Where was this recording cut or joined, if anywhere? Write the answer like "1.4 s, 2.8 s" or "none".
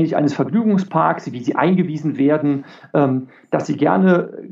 none